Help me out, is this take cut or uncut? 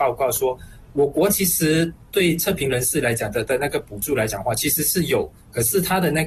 uncut